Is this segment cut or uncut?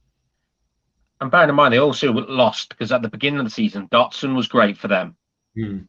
uncut